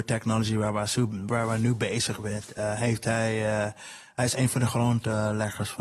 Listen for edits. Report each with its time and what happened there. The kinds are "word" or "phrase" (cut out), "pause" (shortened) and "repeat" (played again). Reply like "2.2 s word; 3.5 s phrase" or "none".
none